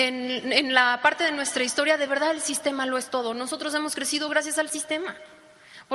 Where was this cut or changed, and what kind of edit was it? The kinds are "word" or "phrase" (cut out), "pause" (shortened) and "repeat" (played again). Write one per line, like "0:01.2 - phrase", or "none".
none